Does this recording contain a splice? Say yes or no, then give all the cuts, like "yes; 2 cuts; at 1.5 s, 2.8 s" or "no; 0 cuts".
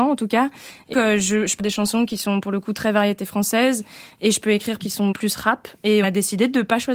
yes; 5 cuts; at 0.9 s, 1.6 s, 4.8 s, 5.1 s, 6.0 s